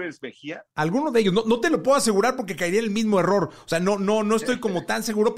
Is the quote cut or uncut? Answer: uncut